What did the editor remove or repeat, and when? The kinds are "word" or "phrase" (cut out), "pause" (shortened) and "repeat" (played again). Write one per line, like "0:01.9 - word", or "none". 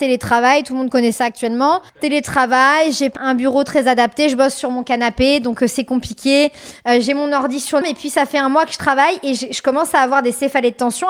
0:01.9 - pause
0:03.2 - word
0:07.8 - phrase

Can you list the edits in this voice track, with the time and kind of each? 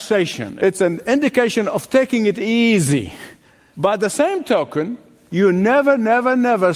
none

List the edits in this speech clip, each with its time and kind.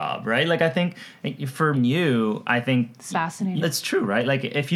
0:01.7 - word
0:03.1 - word
0:03.6 - word

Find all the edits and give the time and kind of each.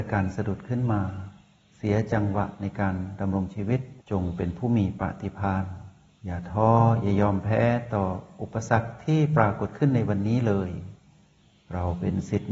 0:04.0 - pause

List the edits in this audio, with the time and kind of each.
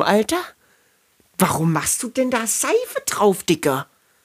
none

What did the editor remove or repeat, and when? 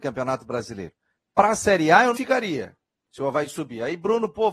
0:02.1 - word

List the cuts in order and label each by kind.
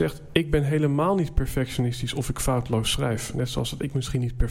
none

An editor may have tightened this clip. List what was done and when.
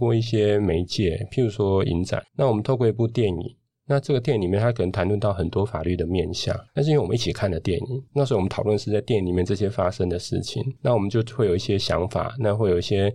0:02.3 - pause
0:06.7 - pause
0:08.1 - pause
0:10.8 - pause

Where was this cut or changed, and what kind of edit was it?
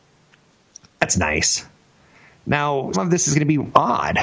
0:02.9 - word

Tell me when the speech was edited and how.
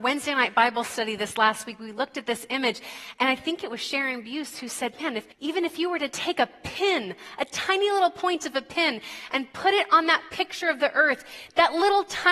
0:05.3 - pause

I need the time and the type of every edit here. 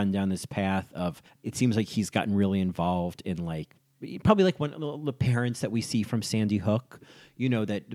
0:01.3 - pause

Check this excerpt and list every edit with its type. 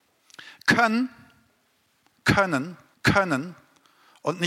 0:02.9 - repeat

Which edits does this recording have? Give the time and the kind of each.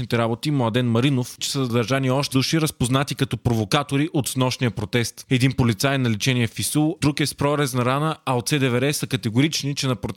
0:01.4 - word
0:02.3 - word

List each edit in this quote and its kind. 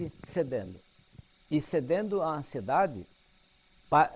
0:01.4 - pause

